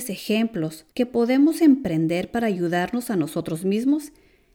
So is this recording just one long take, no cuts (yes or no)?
no